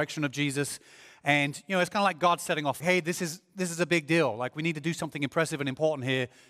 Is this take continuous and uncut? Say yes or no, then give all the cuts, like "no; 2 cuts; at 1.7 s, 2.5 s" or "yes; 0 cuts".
no; 1 cut; at 2.8 s